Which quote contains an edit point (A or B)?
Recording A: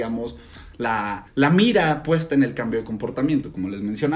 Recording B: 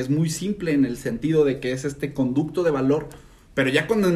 A